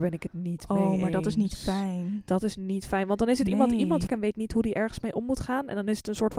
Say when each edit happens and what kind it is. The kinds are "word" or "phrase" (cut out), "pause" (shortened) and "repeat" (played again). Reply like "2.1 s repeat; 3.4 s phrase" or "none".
4.1 s phrase